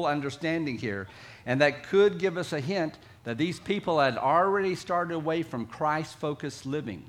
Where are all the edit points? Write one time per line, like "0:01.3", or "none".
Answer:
none